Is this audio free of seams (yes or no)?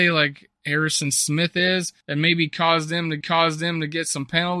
no